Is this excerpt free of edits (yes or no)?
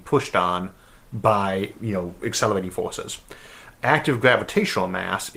yes